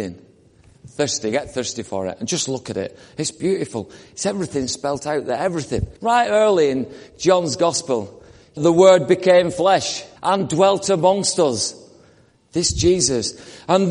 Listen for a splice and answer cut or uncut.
cut